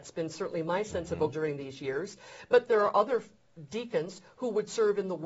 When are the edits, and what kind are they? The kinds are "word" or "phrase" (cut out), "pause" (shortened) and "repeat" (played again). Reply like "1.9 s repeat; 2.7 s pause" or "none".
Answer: 1.3 s word; 2.7 s word